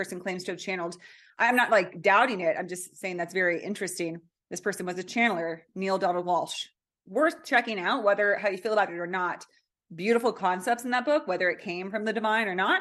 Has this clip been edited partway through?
no; 0 cuts

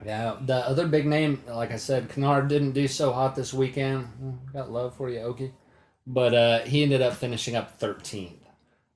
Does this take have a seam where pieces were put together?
no; 0 cuts

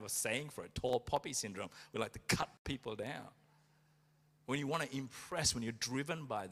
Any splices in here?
no; 0 cuts

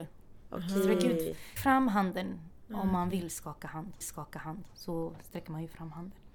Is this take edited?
yes; 2 cuts; at 1.6 s, 4.0 s

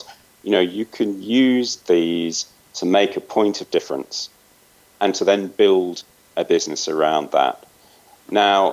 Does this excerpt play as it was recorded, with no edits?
yes; 0 cuts

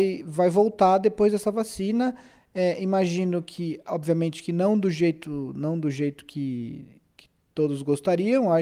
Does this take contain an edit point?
no; 0 cuts

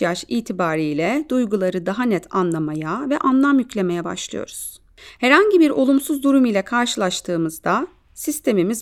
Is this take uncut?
yes; 0 cuts

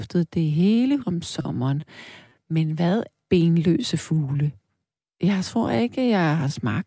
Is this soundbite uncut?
no; 2 cuts; at 1.0 s, 3.2 s

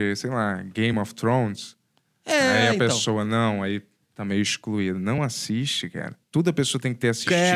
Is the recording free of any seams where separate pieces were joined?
yes; 0 cuts

